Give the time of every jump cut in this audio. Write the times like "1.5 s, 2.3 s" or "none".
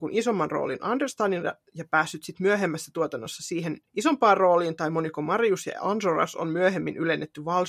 3.9 s